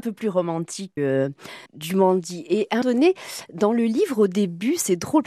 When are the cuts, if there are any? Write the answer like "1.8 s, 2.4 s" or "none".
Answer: 1.0 s, 1.7 s, 2.8 s